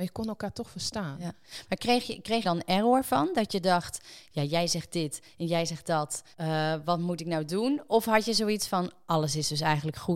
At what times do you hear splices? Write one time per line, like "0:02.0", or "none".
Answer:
0:02.4
0:06.3